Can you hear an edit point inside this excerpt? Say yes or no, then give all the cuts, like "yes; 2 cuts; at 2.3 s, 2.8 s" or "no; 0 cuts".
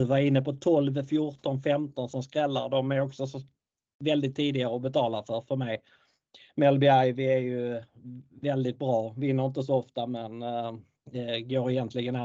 no; 0 cuts